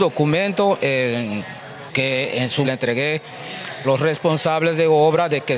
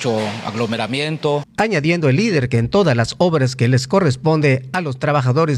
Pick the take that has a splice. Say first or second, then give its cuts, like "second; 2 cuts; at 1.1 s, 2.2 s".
first; 3 cuts; at 1.9 s, 2.6 s, 3.8 s